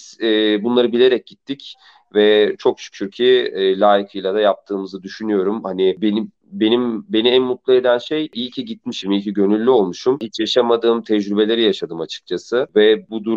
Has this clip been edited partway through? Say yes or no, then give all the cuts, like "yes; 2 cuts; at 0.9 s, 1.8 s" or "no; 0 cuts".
no; 0 cuts